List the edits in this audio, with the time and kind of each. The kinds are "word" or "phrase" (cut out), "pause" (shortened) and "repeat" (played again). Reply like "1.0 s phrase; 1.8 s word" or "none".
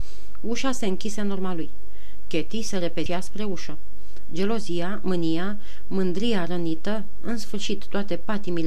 3.1 s word

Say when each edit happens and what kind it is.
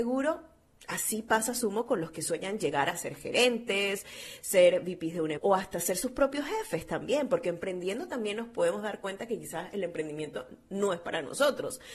5.4 s word

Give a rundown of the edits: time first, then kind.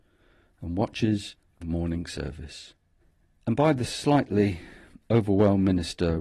1.6 s phrase; 3.0 s pause

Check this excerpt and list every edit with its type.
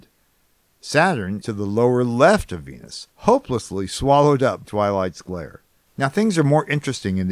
1.4 s word; 3.1 s pause; 4.6 s word; 5.9 s pause

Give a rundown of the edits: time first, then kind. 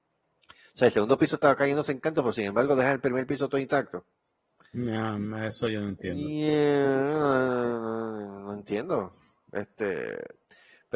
none

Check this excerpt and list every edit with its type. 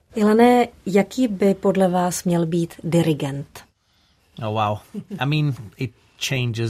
none

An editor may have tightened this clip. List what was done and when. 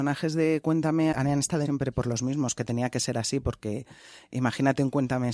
1.1 s word; 1.7 s word

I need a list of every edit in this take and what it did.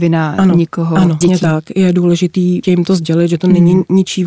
1.2 s word; 2.6 s word

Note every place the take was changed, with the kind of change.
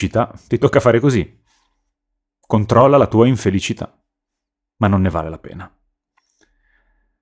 none

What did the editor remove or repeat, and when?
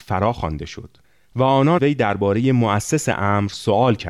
1.0 s pause; 1.8 s word

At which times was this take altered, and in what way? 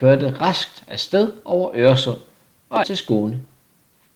2.8 s word

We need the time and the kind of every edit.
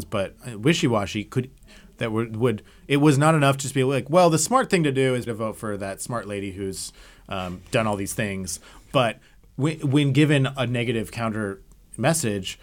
5.3 s word

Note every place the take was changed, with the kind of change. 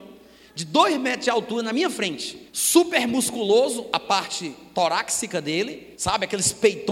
2.5 s pause; 5.9 s pause

